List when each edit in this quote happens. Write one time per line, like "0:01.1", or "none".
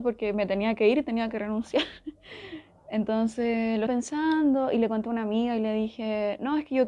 0:03.9